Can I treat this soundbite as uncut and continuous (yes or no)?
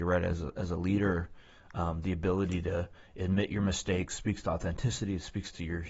yes